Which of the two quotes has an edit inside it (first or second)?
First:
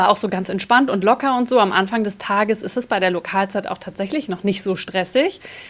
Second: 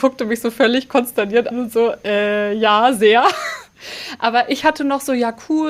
second